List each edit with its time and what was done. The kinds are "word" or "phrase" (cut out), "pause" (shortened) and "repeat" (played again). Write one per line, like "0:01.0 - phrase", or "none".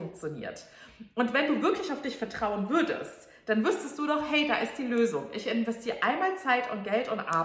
none